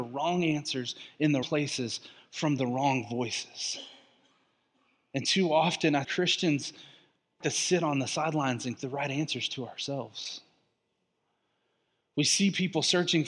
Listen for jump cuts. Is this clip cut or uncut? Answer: cut